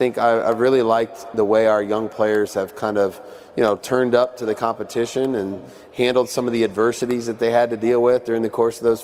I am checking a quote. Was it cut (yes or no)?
no